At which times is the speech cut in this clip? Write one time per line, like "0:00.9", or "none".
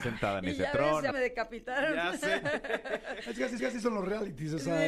0:01.1
0:03.6